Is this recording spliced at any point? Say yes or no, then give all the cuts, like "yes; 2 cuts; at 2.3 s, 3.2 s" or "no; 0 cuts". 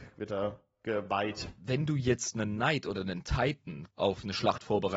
yes; 1 cut; at 3.9 s